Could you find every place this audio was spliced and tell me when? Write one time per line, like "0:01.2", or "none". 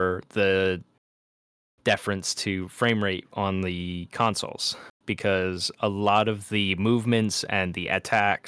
none